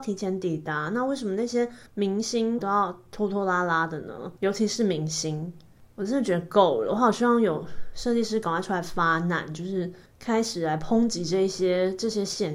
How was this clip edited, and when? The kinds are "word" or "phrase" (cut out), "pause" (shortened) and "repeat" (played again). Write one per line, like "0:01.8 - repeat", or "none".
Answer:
0:01.9 - pause
0:02.6 - word
0:04.4 - pause

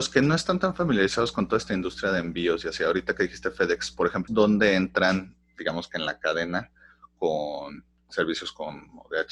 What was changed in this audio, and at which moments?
0:04.3 - word

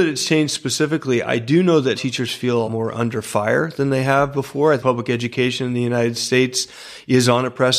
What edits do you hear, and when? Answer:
0:01.9 - word
0:02.6 - word
0:04.8 - word

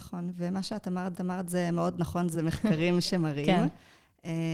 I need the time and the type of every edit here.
0:01.1 - repeat
0:02.3 - phrase

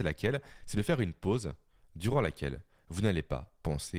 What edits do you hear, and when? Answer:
none

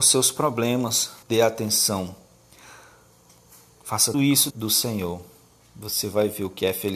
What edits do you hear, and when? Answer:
0:01.2 - pause
0:04.1 - word
0:04.5 - word

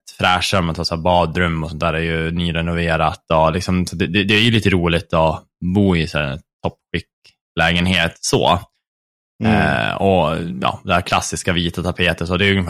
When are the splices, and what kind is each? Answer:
none

